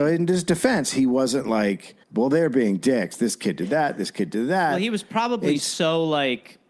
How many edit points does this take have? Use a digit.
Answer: 1